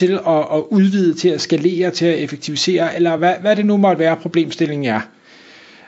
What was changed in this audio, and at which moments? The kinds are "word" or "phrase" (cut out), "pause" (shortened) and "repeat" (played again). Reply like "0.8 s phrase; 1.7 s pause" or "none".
none